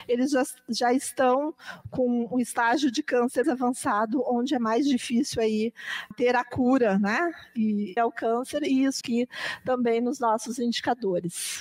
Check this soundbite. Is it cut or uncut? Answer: cut